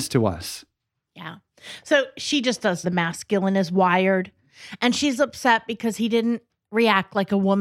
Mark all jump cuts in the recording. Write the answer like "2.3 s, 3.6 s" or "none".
2.8 s